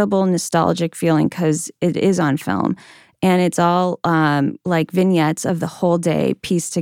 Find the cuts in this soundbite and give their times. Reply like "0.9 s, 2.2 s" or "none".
4.6 s